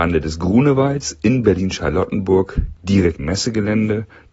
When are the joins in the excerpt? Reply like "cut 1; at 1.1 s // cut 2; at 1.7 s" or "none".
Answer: cut 1; at 3.2 s